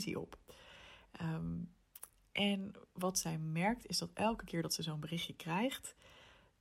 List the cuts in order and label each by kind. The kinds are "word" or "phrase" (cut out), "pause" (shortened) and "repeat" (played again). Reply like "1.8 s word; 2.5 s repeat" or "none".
none